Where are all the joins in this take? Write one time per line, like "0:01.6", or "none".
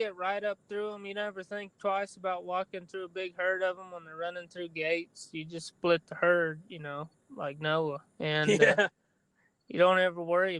0:08.1